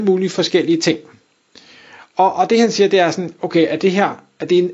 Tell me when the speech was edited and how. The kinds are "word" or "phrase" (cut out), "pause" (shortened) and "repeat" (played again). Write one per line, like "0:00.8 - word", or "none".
none